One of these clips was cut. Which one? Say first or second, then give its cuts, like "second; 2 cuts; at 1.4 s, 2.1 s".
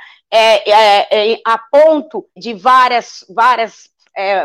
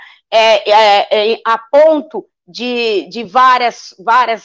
first; 1 cut; at 2.4 s